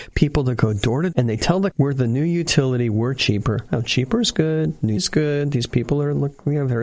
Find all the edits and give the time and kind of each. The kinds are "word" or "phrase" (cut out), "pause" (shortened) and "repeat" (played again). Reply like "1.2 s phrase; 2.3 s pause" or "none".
1.1 s word; 1.7 s word; 5.0 s word